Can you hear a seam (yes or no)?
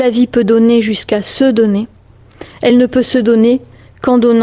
no